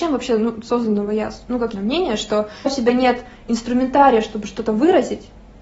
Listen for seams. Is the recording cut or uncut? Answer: cut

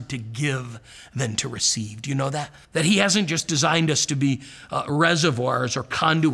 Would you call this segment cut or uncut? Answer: cut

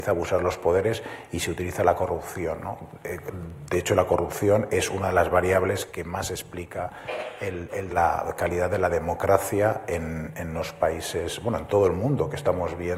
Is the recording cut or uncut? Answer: cut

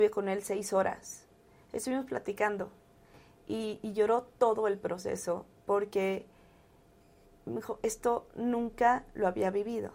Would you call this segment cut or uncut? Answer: uncut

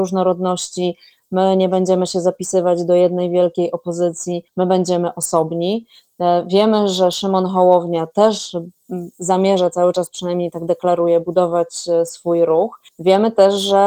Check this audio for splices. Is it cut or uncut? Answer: cut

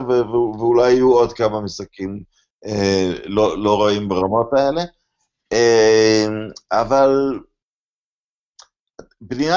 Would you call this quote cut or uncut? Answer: uncut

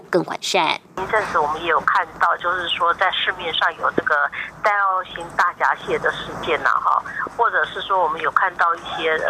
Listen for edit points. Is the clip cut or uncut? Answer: uncut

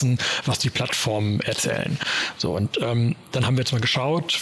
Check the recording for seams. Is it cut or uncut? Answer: uncut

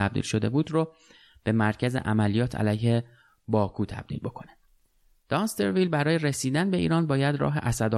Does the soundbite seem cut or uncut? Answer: uncut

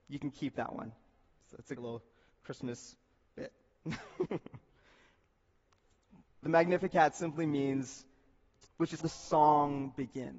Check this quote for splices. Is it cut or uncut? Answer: cut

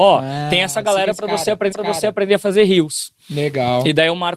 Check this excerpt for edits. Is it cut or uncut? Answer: cut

